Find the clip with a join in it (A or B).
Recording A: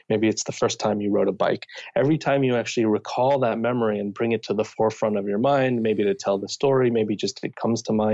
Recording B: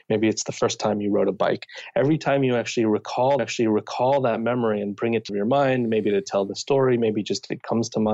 B